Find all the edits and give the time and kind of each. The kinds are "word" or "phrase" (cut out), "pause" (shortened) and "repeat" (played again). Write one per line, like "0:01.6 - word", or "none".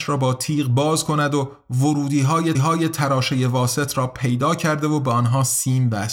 0:02.5 - repeat